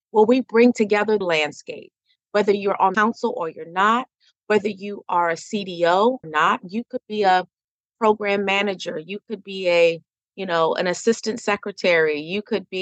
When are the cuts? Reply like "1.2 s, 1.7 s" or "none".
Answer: 1.2 s, 2.9 s, 6.2 s, 10.1 s